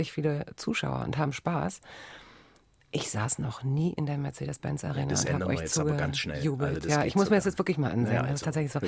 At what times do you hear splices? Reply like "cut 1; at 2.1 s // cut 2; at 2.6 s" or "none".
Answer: none